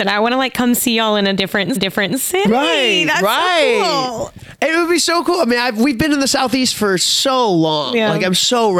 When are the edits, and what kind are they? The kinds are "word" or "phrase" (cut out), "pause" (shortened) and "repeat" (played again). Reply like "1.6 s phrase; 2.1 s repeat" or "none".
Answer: 1.8 s repeat